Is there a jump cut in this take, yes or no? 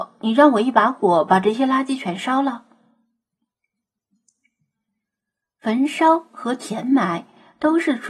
no